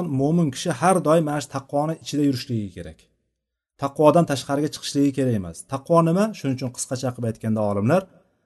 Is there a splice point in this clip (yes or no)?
no